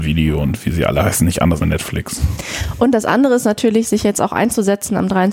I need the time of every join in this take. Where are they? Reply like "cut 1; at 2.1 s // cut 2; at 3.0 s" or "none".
cut 1; at 1.6 s